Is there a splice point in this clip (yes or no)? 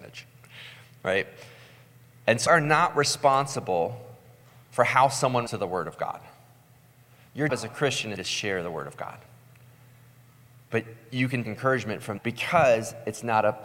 yes